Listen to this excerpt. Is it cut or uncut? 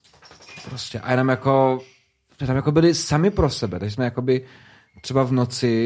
uncut